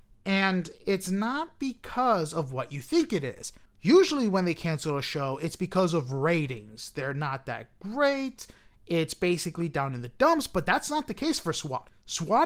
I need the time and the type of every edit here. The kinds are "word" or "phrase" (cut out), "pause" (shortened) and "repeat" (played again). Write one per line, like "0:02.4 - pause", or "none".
none

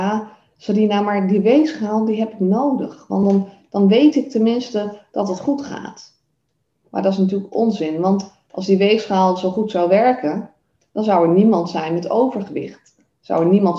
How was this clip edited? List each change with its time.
none

